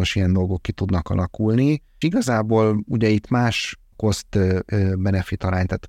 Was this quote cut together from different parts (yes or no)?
yes